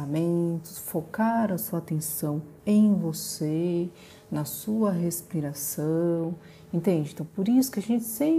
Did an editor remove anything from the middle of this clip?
yes; 1 cut; at 2.6 s

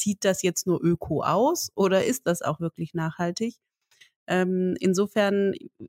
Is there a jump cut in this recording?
no; 0 cuts

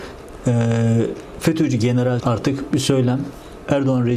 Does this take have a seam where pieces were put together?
yes; 2 cuts; at 2.2 s, 2.7 s

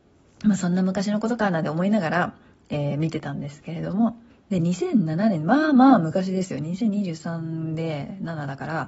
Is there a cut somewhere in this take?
yes; 1 cut; at 4.3 s

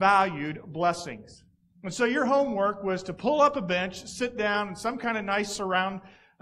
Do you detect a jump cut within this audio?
no; 0 cuts

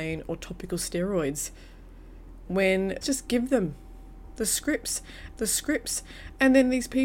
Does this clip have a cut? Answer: yes; 3 cuts; at 2.5 s, 3.0 s, 5.3 s

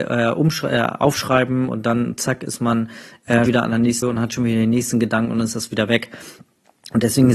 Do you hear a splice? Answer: yes; 2 cuts; at 3.5 s, 4.0 s

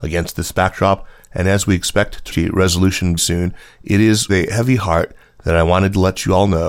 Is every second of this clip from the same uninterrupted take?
no; 3 cuts; at 2.3 s, 3.2 s, 4.3 s

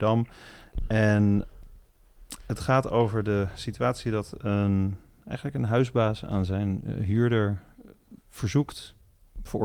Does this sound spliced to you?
no; 0 cuts

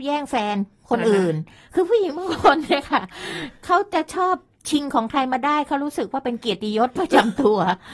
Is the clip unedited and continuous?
yes; 0 cuts

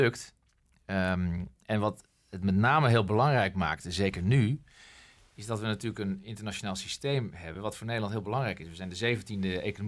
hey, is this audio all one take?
yes; 0 cuts

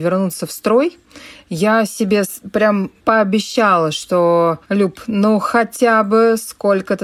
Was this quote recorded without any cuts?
no; 2 cuts; at 3.0 s, 4.6 s

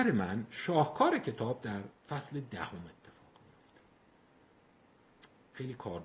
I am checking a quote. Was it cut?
yes; 1 cut; at 2.0 s

